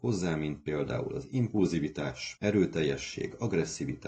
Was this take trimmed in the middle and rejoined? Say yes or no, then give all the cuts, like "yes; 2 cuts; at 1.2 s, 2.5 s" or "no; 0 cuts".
no; 0 cuts